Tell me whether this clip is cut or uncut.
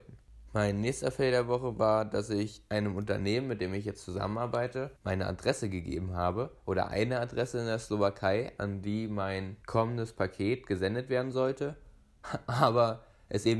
cut